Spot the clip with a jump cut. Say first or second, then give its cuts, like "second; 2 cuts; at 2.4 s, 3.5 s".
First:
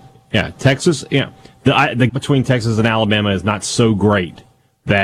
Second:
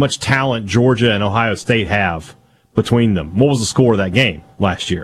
first; 1 cut; at 2.1 s